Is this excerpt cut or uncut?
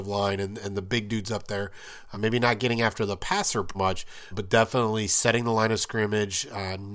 cut